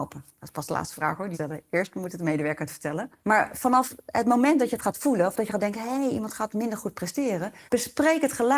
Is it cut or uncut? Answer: cut